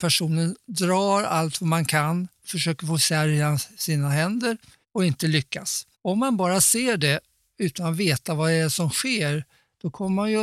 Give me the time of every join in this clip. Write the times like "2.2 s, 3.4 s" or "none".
4.8 s, 5.9 s